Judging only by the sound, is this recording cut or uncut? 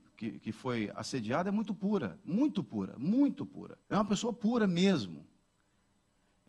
cut